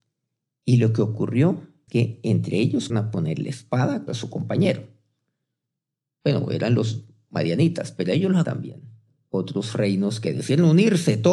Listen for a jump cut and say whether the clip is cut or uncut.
cut